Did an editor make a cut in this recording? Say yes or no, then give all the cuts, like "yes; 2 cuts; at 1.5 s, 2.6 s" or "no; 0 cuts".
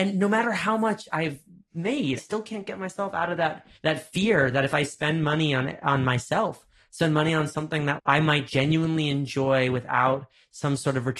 yes; 4 cuts; at 2.2 s, 3.8 s, 8.0 s, 8.5 s